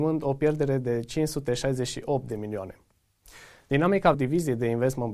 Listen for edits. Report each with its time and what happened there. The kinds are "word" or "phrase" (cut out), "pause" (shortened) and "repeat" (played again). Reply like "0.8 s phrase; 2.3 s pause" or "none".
4.1 s word